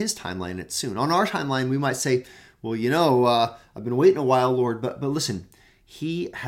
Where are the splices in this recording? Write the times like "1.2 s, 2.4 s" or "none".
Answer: none